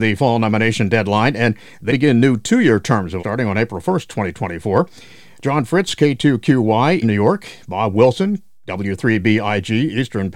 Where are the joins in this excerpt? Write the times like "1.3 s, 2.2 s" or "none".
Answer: 1.9 s, 3.2 s, 7.0 s